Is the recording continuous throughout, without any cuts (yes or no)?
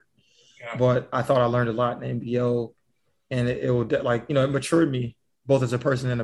yes